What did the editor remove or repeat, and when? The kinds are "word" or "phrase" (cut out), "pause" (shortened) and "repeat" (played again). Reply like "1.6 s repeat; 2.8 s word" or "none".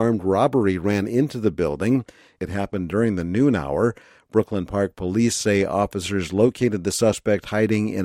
none